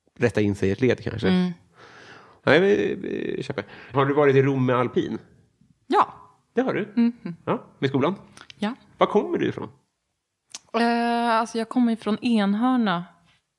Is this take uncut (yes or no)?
no